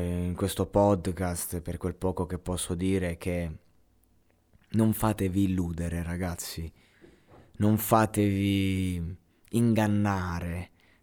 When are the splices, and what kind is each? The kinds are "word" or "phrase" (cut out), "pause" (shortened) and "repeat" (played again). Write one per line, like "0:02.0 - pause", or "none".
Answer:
none